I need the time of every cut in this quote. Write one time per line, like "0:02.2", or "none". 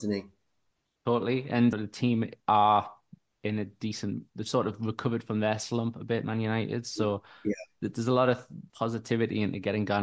0:01.7
0:02.4
0:04.3
0:08.7